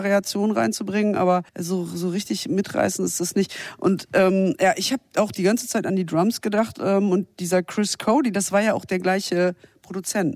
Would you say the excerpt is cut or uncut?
cut